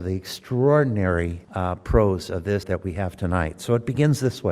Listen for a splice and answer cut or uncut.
cut